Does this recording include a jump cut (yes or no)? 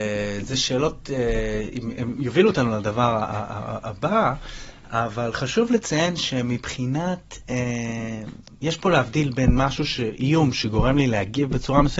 no